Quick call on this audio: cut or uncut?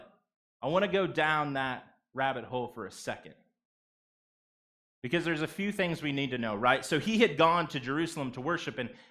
uncut